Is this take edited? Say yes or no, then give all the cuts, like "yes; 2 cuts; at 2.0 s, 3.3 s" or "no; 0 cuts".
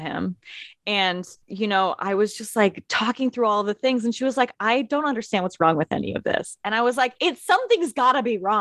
yes; 1 cut; at 1.4 s